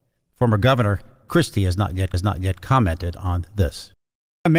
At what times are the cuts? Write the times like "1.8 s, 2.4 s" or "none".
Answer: 1.3 s, 2.1 s